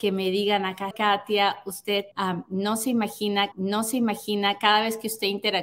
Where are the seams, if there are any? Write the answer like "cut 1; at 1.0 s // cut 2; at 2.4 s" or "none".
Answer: cut 1; at 0.9 s // cut 2; at 2.1 s // cut 3; at 3.5 s